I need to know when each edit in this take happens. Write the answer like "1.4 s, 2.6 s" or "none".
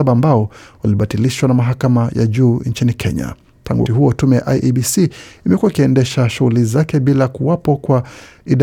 3.9 s